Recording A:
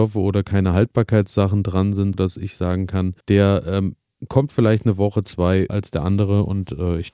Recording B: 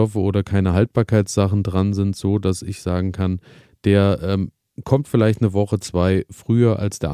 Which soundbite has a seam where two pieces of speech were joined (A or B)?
A